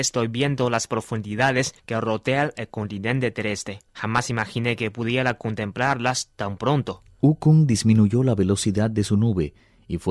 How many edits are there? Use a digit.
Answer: 2